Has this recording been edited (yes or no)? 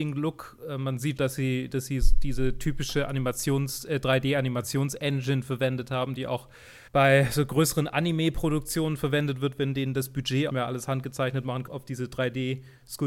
yes